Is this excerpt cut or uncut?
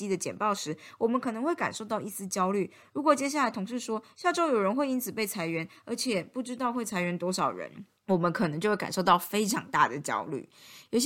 cut